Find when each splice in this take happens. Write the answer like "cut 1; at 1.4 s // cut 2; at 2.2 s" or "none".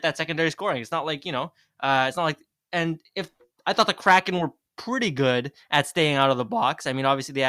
none